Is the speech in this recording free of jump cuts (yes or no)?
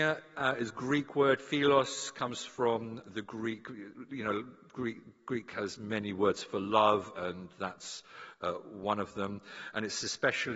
no